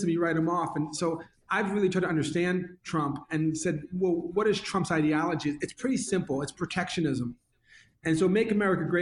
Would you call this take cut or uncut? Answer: uncut